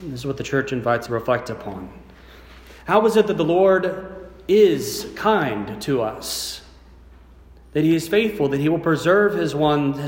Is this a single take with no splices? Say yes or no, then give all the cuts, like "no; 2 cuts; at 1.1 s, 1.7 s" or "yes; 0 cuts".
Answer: no; 1 cut; at 1.1 s